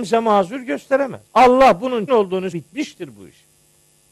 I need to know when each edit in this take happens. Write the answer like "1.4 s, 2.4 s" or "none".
1.3 s, 2.1 s, 2.5 s